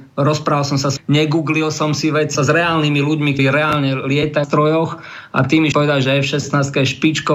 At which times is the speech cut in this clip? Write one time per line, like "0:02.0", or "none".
0:01.0
0:02.3
0:03.4
0:04.4
0:05.7